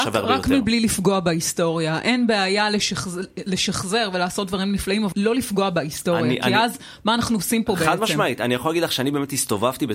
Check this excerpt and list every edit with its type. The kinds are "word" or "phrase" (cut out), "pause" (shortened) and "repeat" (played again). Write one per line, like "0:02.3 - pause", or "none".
0:05.1 - word